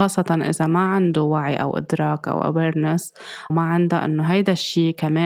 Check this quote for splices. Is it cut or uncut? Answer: cut